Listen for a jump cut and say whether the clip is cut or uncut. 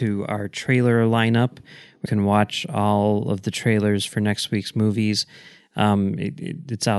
cut